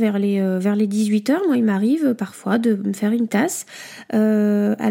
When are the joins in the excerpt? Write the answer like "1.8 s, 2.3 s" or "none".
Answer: 3.3 s